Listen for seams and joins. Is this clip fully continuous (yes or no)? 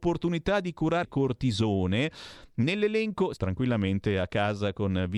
no